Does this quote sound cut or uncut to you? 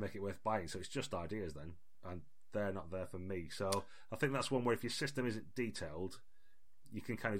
uncut